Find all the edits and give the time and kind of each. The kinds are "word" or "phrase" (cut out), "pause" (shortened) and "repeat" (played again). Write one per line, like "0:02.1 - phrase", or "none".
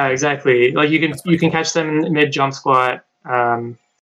none